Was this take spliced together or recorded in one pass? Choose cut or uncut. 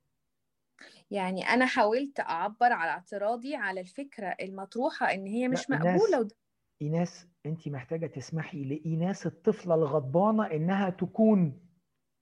uncut